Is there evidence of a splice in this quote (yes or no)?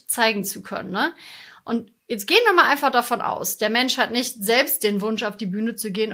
no